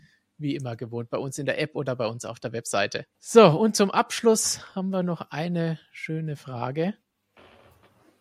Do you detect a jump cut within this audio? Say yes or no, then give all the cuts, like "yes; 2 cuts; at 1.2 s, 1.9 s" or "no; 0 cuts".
yes; 1 cut; at 3.1 s